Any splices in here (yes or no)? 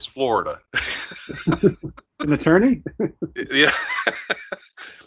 yes